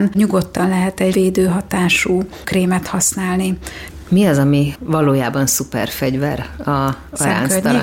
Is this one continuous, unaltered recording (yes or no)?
no